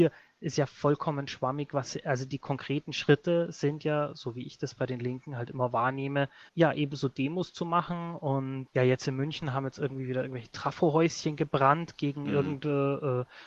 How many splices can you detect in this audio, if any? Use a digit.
1